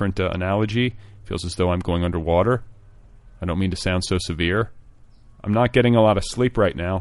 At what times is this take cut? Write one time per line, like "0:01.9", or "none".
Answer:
0:02.9

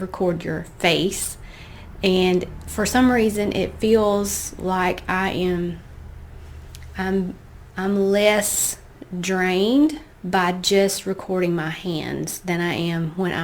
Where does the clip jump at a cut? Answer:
0:10.1

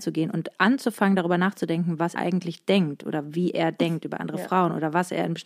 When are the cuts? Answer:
0:02.2

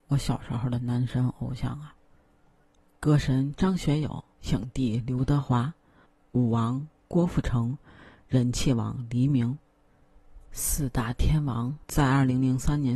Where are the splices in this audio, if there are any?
0:04.3

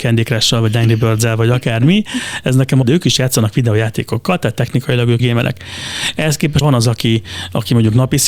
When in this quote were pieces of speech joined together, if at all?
0:02.8
0:05.2
0:06.6

